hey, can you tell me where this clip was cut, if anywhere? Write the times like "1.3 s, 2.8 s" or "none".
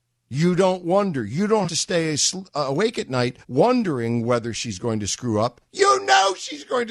1.7 s, 3.4 s